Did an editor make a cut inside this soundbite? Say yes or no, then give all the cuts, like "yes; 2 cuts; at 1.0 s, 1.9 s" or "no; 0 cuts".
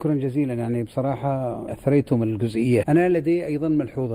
yes; 2 cuts; at 1.7 s, 2.8 s